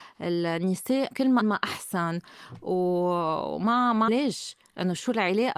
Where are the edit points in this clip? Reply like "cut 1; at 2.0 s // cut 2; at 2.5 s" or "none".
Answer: cut 1; at 1.1 s // cut 2; at 1.4 s // cut 3; at 4.1 s